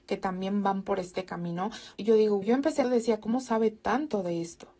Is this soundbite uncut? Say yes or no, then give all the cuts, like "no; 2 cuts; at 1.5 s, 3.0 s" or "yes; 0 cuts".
no; 3 cuts; at 2.0 s, 2.4 s, 2.8 s